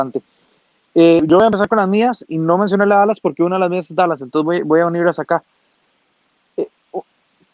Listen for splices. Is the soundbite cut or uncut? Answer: uncut